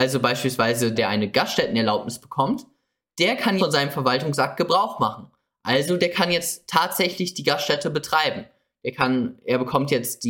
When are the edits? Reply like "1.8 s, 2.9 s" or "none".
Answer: 1.0 s, 3.6 s